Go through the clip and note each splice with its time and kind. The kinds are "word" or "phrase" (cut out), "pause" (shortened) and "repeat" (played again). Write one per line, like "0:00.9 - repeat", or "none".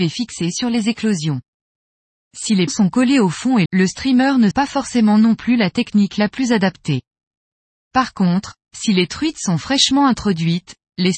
0:02.7 - word
0:03.7 - word
0:04.5 - word